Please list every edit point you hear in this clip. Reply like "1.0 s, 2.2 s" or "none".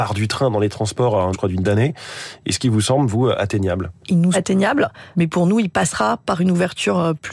1.3 s, 1.6 s, 4.0 s, 4.3 s, 5.1 s